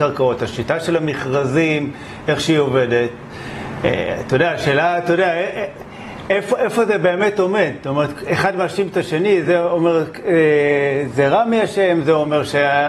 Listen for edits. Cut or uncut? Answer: uncut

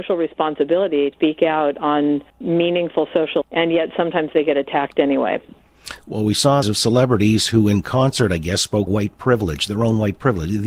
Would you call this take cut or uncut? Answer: cut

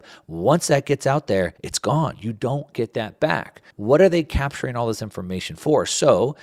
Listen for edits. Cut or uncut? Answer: cut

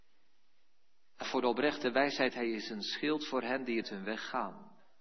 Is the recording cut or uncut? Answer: cut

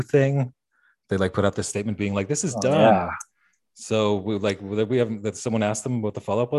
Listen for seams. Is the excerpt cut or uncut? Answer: uncut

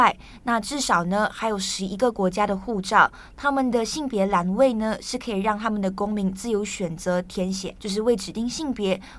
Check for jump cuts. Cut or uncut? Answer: cut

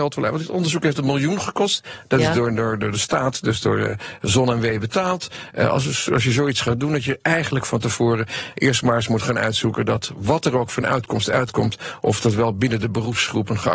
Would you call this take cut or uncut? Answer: uncut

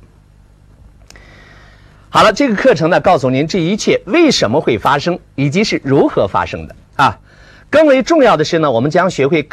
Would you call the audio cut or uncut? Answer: cut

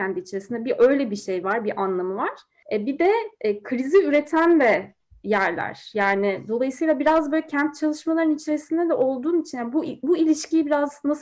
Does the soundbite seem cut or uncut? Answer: uncut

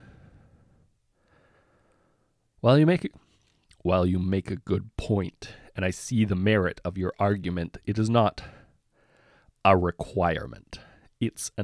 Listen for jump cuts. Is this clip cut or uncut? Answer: uncut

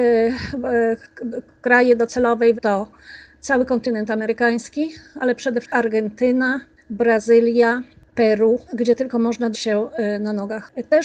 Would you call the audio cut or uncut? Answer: cut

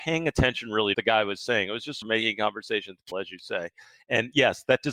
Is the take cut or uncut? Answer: cut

